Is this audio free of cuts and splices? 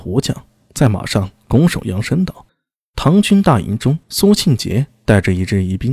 no; 2 cuts; at 2.5 s, 4.0 s

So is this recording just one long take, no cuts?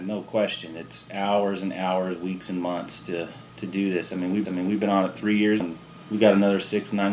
no; 3 cuts; at 3.5 s, 4.4 s, 5.6 s

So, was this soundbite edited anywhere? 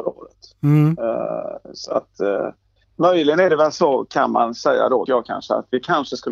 yes; 1 cut; at 5.1 s

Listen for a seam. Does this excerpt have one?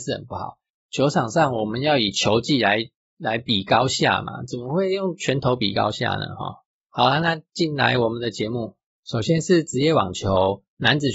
no; 0 cuts

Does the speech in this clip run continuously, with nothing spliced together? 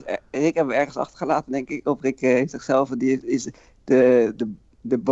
yes; 0 cuts

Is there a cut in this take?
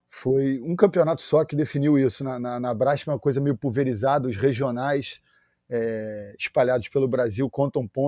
no; 0 cuts

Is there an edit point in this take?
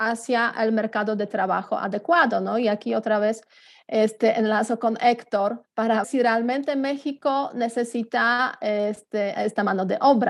yes; 2 cuts; at 6.0 s, 9.3 s

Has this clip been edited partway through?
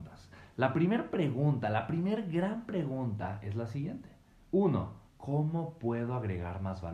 yes; 1 cut; at 5.1 s

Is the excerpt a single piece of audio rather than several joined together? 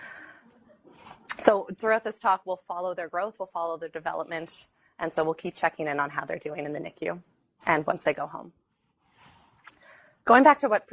yes; 0 cuts

